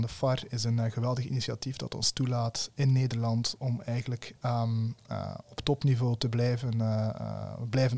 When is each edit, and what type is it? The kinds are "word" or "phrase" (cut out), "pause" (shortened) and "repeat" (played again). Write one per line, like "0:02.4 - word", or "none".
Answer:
none

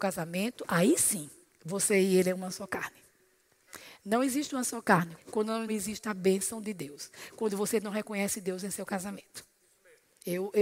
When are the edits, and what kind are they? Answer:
0:01.4 - pause
0:05.2 - phrase
0:05.7 - phrase

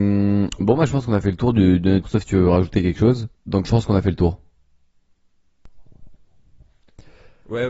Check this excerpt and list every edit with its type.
0:02.0 - phrase
0:03.3 - pause

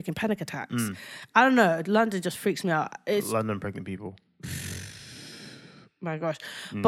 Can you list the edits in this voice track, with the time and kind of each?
none

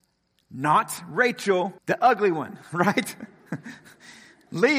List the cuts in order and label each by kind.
0:01.8 - pause
0:02.6 - pause

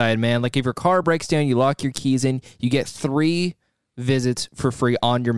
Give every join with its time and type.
none

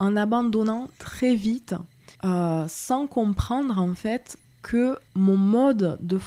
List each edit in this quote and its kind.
0:02.1 - pause
0:05.1 - pause

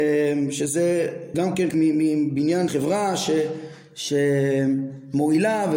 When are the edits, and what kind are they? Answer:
0:01.3 - word
0:01.7 - word
0:02.7 - word

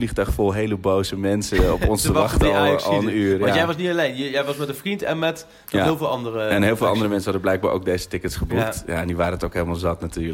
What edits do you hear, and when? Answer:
none

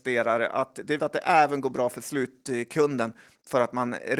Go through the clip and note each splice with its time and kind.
0:01.0 - word

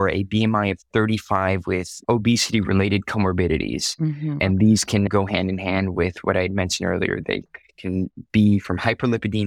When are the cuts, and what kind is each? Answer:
none

